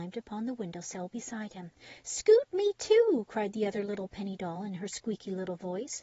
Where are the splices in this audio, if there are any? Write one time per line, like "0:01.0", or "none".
none